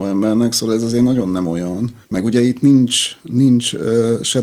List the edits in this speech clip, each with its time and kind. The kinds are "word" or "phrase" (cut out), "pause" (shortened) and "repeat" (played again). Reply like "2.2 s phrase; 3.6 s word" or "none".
2.0 s pause